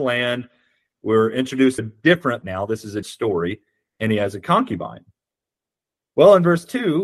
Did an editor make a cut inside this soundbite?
yes; 3 cuts; at 1.8 s, 2.4 s, 3.0 s

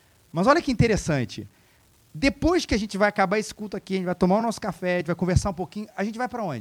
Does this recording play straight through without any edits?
yes; 0 cuts

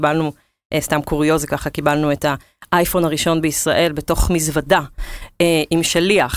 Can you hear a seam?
no; 0 cuts

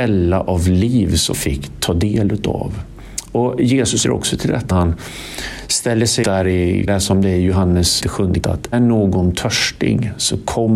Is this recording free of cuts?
no; 8 cuts; at 1.3 s, 4.0 s, 4.7 s, 6.2 s, 6.9 s, 8.0 s, 8.4 s, 8.7 s

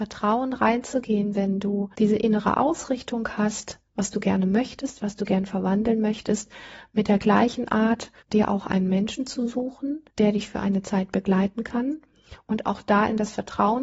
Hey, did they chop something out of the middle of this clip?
yes; 3 cuts; at 1.9 s, 8.2 s, 10.1 s

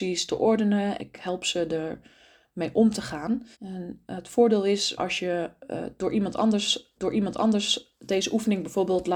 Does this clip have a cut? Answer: yes; 4 cuts; at 1.0 s, 3.5 s, 5.0 s, 7.0 s

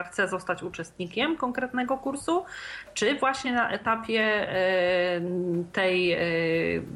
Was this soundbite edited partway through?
no; 0 cuts

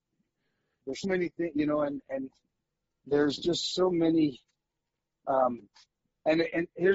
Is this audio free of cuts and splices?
no; 1 cut; at 1.0 s

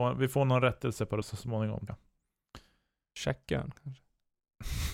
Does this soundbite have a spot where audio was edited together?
yes; 2 cuts; at 1.2 s, 1.9 s

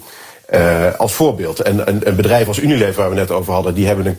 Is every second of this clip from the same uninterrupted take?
yes; 0 cuts

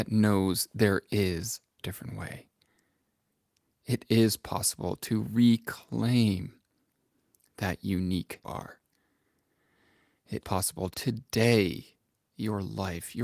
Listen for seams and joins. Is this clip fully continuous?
no; 4 cuts; at 1.8 s, 8.4 s, 10.4 s, 10.9 s

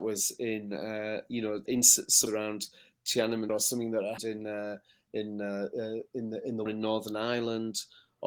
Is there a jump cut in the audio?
yes; 5 cuts; at 1.7 s, 2.3 s, 3.5 s, 4.2 s, 6.7 s

